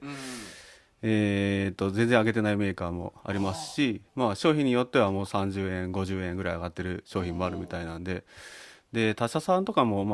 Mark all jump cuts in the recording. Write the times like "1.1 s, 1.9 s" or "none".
3.2 s, 4.1 s